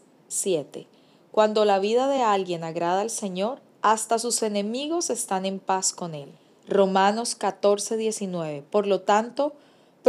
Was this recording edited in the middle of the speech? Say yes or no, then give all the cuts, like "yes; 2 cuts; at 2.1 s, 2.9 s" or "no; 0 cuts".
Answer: no; 0 cuts